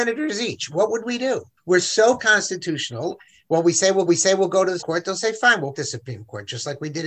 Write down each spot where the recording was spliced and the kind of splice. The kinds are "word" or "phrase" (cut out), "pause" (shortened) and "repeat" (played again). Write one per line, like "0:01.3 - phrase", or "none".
0:01.6 - pause
0:02.2 - word
0:04.1 - repeat
0:04.8 - word
0:05.7 - word